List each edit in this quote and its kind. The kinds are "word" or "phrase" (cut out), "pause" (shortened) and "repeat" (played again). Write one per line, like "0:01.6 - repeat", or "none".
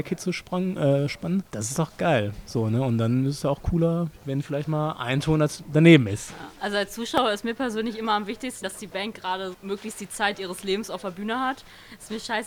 0:01.5 - pause
0:04.2 - pause
0:06.6 - pause
0:08.6 - phrase
0:09.5 - word